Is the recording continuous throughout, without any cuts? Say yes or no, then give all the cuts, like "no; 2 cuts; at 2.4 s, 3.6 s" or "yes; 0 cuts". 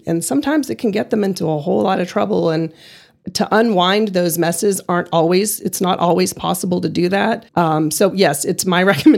no; 1 cut; at 7.5 s